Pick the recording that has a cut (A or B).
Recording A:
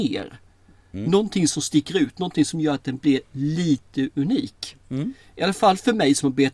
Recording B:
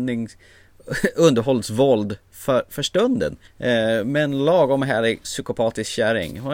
B